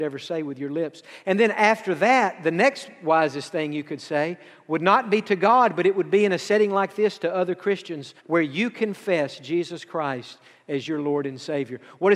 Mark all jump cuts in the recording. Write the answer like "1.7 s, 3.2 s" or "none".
8.2 s